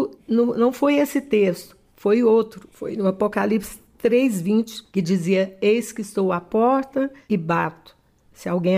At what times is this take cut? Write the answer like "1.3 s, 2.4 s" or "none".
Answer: none